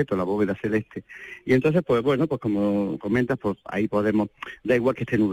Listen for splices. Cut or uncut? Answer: uncut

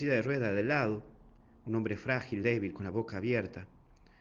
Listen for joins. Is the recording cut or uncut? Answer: uncut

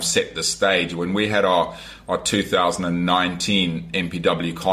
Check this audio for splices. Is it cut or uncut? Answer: uncut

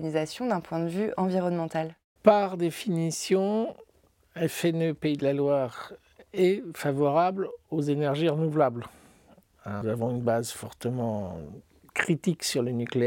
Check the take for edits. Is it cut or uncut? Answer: cut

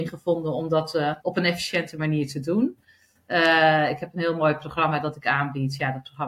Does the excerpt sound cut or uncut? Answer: cut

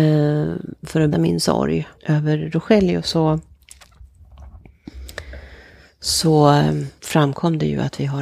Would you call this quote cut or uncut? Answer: cut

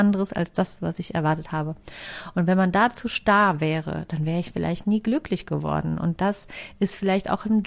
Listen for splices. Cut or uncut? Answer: uncut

